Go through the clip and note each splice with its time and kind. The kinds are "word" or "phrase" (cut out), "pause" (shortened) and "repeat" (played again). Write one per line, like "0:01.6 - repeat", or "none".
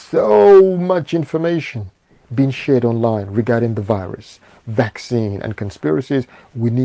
none